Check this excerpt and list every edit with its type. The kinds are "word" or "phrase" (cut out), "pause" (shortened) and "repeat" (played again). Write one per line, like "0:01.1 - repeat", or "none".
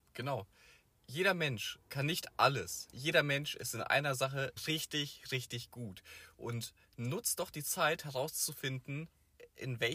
0:01.8 - pause
0:02.9 - word
0:04.6 - word